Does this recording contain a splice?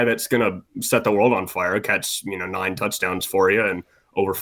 no; 0 cuts

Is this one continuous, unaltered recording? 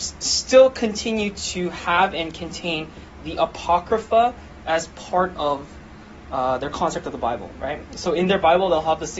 yes; 0 cuts

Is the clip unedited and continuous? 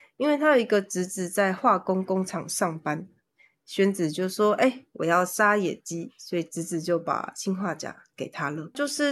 yes; 0 cuts

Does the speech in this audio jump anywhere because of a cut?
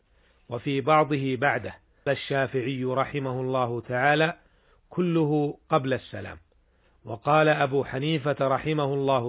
yes; 1 cut; at 2.1 s

